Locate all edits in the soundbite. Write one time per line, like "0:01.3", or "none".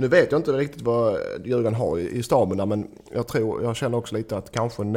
none